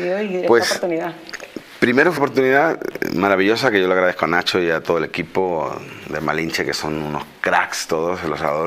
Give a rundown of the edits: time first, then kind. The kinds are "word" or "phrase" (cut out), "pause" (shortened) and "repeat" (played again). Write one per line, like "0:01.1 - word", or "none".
0:02.2 - word